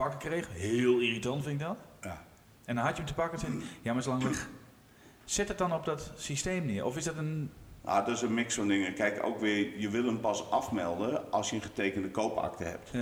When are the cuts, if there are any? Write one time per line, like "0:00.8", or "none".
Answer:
none